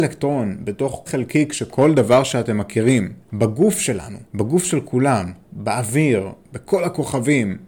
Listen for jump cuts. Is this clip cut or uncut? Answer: cut